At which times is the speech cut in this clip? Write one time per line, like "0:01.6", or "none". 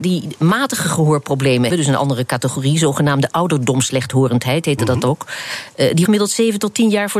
0:01.7
0:06.0